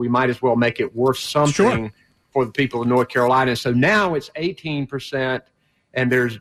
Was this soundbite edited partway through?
no; 0 cuts

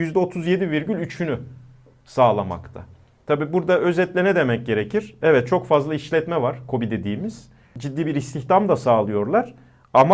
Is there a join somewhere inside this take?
no; 0 cuts

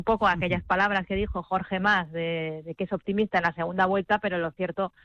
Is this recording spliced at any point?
no; 0 cuts

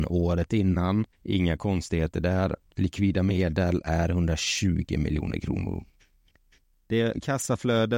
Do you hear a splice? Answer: yes; 1 cut; at 1.1 s

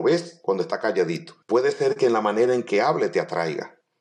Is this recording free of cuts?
no; 1 cut; at 1.4 s

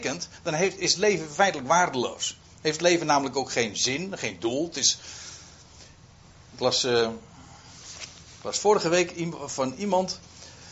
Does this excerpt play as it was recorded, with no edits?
yes; 0 cuts

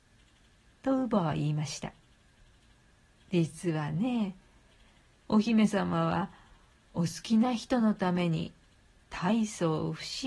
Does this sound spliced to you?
no; 0 cuts

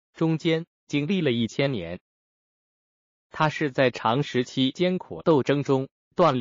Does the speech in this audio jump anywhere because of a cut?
no; 0 cuts

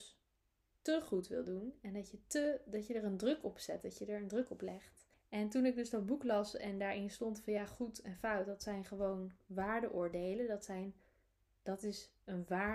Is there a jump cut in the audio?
yes; 1 cut; at 5.1 s

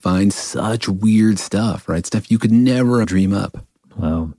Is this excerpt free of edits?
no; 1 cut; at 3.0 s

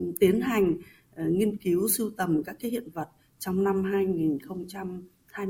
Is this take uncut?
yes; 0 cuts

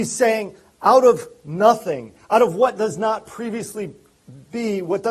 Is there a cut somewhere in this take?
no; 0 cuts

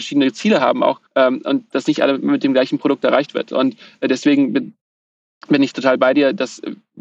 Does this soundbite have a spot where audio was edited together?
yes; 1 cut; at 1.1 s

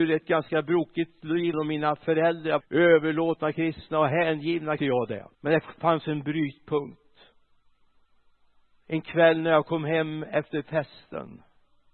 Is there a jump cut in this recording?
yes; 4 cuts; at 1.5 s, 2.6 s, 4.8 s, 5.3 s

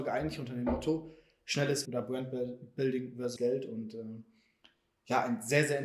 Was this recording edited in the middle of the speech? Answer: yes; 2 cuts; at 1.8 s, 3.4 s

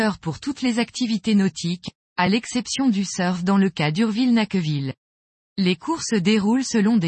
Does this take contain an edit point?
no; 0 cuts

